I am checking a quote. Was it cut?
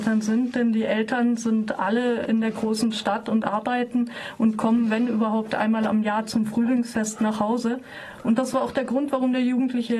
no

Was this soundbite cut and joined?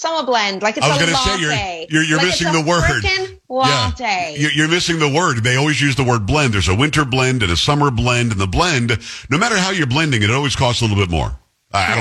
no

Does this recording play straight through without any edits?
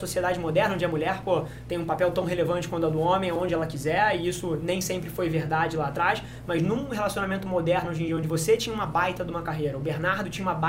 yes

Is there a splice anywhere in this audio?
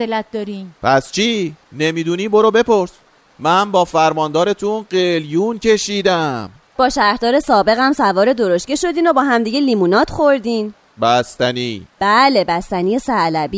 no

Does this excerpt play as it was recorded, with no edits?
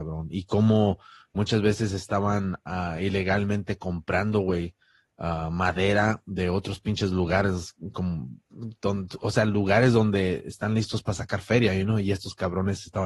yes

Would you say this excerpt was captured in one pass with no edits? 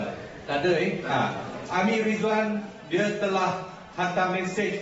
yes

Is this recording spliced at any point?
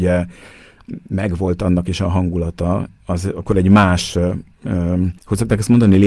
yes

